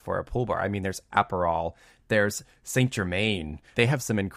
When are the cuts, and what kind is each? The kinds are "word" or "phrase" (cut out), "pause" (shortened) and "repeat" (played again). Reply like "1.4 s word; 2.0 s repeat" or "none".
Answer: none